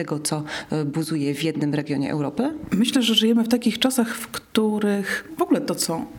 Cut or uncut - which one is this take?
uncut